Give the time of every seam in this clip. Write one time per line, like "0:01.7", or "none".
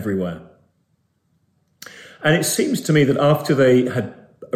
none